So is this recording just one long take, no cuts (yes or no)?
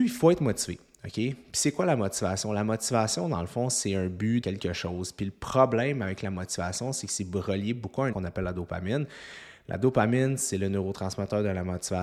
no